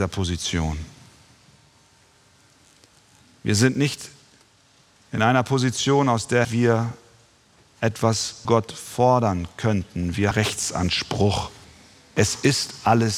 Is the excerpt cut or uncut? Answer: cut